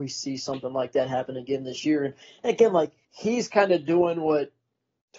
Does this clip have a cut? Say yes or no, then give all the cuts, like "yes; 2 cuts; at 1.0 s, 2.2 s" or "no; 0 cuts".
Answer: yes; 1 cut; at 3.0 s